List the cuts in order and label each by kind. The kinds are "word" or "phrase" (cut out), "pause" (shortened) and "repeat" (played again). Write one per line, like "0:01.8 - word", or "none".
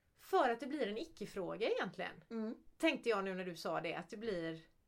none